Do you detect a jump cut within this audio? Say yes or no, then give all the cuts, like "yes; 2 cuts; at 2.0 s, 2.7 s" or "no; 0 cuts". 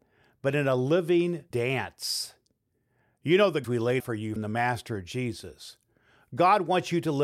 yes; 4 cuts; at 1.5 s, 3.6 s, 4.0 s, 4.4 s